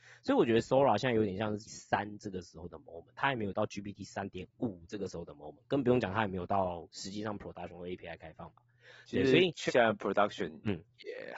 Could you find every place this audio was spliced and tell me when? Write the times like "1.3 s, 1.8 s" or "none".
1.7 s, 9.7 s